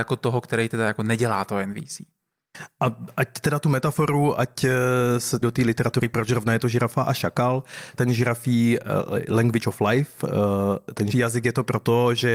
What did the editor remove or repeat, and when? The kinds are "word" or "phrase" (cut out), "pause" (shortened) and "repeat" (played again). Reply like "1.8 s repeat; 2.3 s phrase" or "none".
5.4 s phrase; 8.0 s word; 11.1 s word